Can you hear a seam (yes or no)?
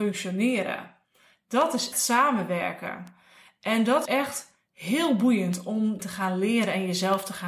yes